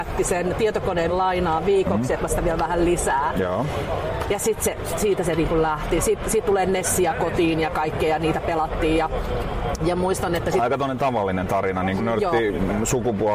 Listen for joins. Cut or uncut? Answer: cut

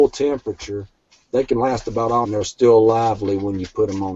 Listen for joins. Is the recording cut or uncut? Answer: cut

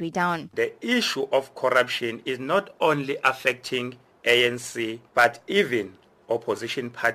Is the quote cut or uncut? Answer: uncut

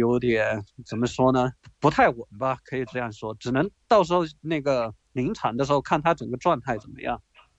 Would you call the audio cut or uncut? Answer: cut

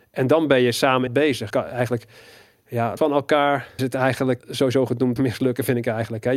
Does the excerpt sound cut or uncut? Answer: cut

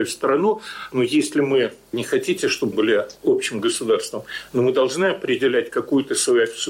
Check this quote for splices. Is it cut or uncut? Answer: cut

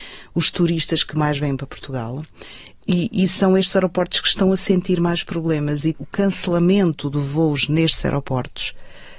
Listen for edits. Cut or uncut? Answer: cut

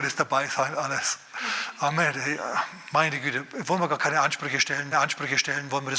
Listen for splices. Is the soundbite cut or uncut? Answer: cut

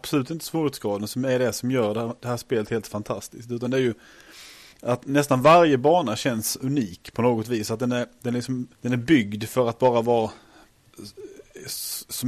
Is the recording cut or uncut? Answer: cut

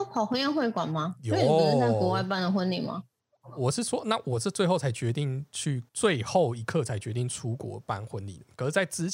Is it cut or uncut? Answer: cut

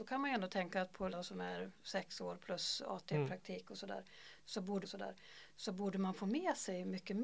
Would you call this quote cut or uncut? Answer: cut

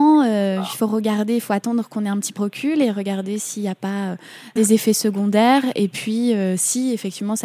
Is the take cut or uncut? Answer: cut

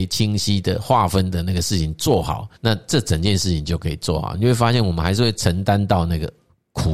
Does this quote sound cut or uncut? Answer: cut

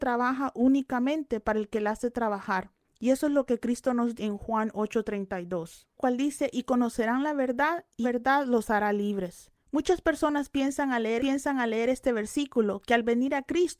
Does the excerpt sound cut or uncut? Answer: cut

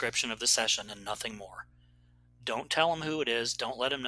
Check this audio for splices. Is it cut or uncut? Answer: uncut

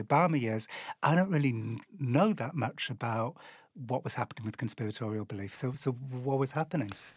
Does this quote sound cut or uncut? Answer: uncut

